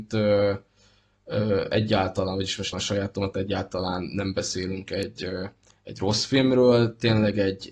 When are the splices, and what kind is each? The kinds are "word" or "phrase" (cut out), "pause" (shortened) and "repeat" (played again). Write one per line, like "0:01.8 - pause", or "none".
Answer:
0:02.7 - phrase